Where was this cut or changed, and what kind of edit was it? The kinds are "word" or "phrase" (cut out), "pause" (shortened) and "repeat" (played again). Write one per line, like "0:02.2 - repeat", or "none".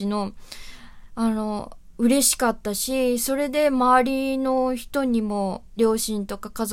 0:05.8 - word